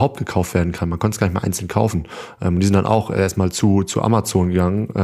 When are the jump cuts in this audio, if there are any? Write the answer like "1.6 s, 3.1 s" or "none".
none